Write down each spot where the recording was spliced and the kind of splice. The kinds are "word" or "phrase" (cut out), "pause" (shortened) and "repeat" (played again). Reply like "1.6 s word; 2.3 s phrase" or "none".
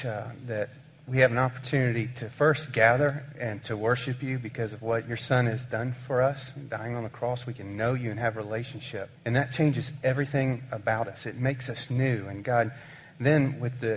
9.2 s pause